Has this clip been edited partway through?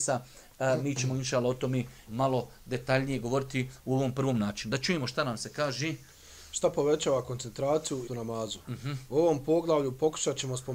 yes; 2 cuts; at 2.1 s, 8.1 s

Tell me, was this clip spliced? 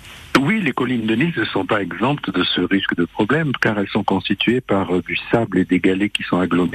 no; 0 cuts

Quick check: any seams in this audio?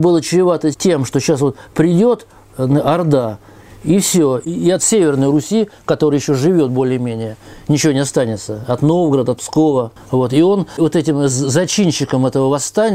yes; 1 cut; at 10.0 s

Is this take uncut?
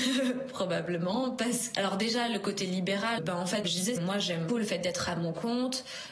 no; 5 cuts; at 1.7 s, 3.2 s, 3.6 s, 4.0 s, 4.5 s

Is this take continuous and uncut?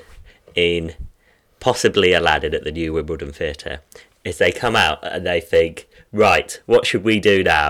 yes; 0 cuts

